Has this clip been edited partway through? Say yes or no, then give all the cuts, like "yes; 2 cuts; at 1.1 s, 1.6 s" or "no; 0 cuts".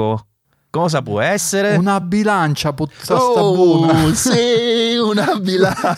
no; 0 cuts